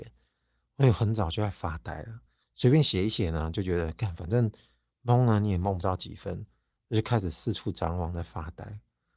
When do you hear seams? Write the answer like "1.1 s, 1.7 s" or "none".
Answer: none